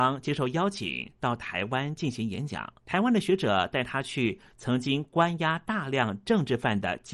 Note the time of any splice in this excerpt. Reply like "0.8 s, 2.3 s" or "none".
2.8 s